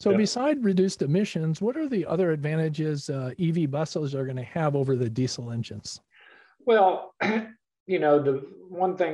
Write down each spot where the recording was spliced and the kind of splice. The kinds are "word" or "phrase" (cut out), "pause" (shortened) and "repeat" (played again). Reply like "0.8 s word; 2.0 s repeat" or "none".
none

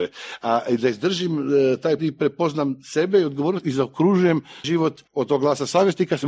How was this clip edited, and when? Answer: 2.0 s word; 4.6 s word; 5.1 s pause

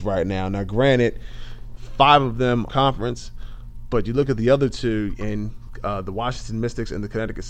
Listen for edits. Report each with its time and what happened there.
2.7 s phrase

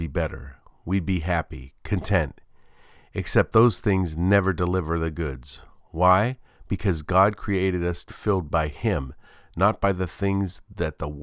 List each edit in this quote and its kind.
8.1 s word

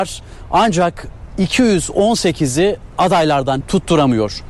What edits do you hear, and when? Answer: 3.6 s word

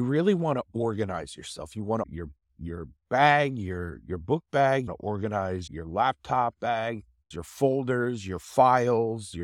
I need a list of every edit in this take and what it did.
2.0 s phrase; 3.0 s pause; 4.9 s phrase; 5.7 s word; 7.3 s word

